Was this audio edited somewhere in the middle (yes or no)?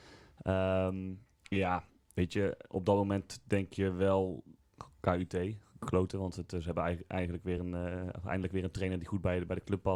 no